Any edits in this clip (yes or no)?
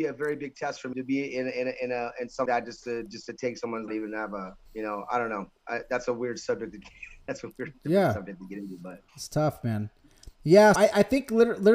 yes